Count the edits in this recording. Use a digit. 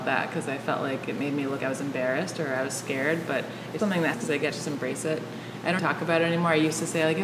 5